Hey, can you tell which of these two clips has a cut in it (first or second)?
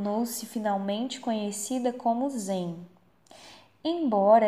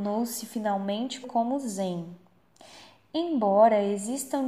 second